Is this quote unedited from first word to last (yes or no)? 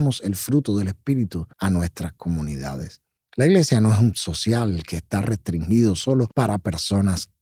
no